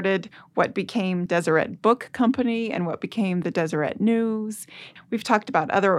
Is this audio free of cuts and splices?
yes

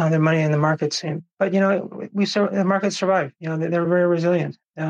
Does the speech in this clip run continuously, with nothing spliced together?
yes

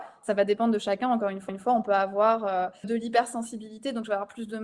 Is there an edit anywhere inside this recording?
yes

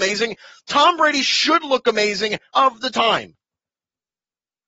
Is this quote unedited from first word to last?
no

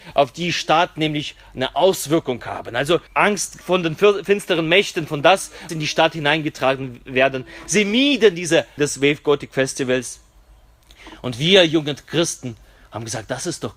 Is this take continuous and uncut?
no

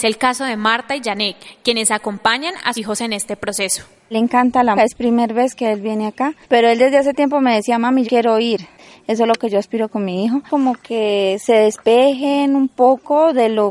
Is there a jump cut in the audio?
yes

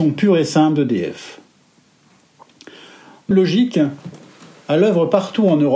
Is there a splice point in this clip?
yes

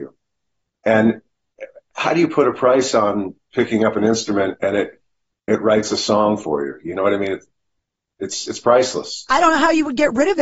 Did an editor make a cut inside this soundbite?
no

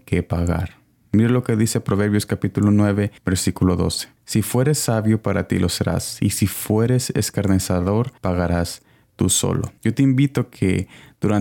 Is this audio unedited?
no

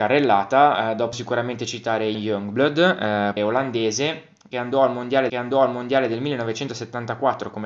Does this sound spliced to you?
yes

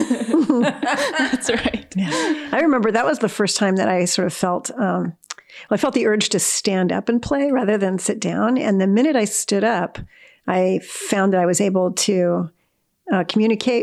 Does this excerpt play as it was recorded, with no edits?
yes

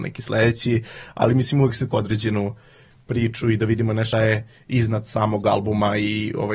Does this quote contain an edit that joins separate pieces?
yes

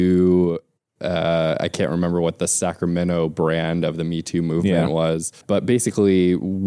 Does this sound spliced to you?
yes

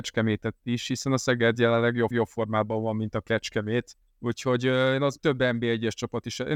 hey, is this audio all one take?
no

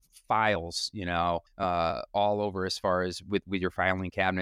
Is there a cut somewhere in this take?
yes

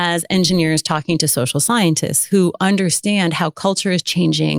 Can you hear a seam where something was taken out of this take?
no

